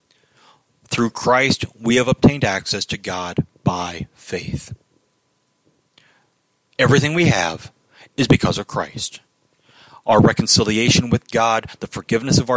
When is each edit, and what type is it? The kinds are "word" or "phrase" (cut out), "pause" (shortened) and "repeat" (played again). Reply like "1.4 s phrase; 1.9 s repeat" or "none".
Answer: none

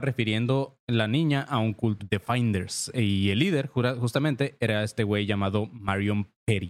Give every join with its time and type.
2.0 s word

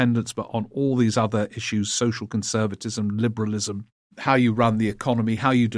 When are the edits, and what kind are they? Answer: none

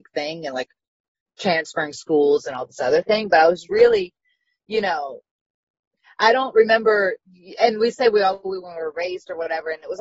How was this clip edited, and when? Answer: none

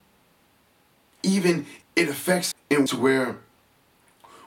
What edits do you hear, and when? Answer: 1.8 s word; 2.5 s word; 2.9 s word

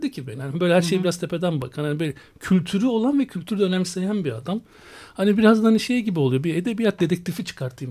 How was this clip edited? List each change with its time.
none

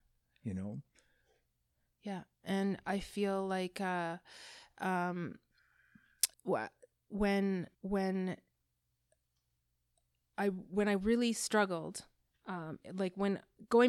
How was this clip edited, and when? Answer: 6.3 s pause; 7.7 s pause

